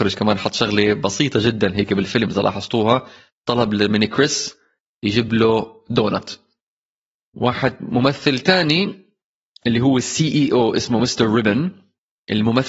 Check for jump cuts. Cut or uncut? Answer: uncut